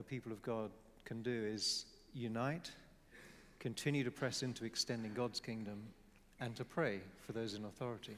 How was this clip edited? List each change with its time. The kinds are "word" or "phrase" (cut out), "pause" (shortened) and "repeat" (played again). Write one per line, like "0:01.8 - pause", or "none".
none